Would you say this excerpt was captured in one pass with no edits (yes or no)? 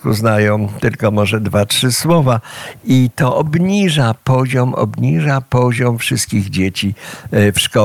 yes